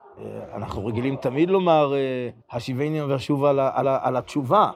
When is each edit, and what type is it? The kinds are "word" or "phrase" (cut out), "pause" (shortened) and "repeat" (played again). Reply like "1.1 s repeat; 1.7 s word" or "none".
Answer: 2.4 s pause; 3.8 s repeat